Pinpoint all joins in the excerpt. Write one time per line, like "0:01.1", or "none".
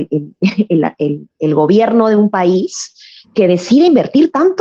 none